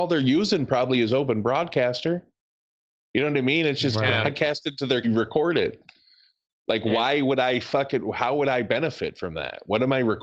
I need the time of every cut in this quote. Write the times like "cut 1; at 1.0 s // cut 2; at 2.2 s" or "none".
cut 1; at 5.0 s